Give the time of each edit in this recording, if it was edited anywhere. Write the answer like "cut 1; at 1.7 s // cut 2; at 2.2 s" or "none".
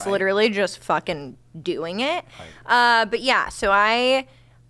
none